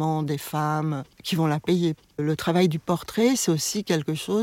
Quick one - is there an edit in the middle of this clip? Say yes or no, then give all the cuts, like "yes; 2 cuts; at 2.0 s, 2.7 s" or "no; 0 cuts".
no; 0 cuts